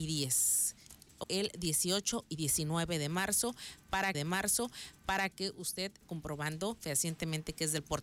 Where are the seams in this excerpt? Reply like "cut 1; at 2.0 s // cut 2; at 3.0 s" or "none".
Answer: cut 1; at 1.2 s // cut 2; at 4.1 s // cut 3; at 6.0 s